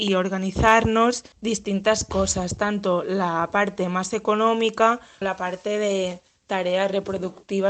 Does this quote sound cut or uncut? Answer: cut